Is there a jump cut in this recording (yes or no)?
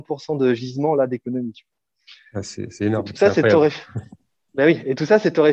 no